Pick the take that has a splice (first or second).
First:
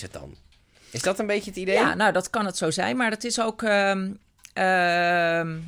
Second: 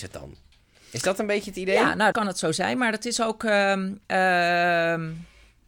second